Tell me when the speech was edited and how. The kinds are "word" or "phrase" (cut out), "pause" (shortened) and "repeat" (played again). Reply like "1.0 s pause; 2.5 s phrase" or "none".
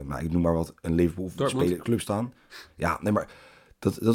2.0 s phrase

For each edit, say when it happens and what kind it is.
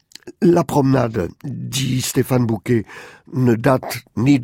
none

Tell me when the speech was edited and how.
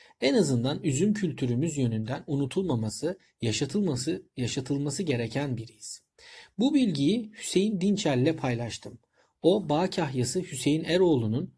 none

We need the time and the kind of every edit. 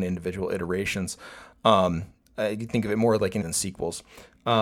3.4 s word

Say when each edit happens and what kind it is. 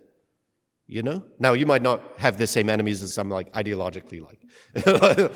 3.1 s phrase

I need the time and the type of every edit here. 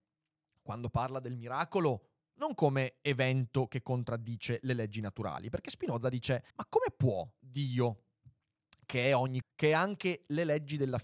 6.5 s pause; 9.4 s word

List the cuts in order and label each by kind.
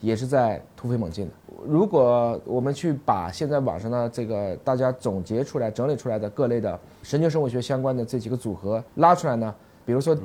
8.9 s pause

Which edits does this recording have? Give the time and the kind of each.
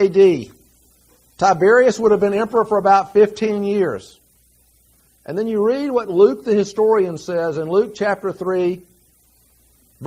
none

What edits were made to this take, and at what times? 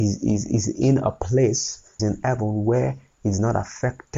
2.0 s word

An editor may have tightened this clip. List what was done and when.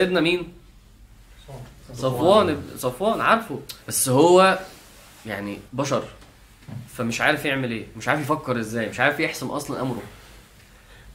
3.8 s pause; 5.7 s pause

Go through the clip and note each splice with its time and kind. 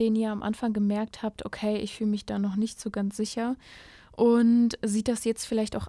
none

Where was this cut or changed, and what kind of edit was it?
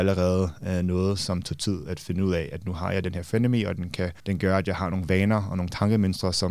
4.2 s pause

